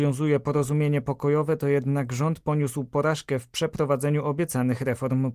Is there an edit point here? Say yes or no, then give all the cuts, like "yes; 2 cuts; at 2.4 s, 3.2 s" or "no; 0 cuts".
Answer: no; 0 cuts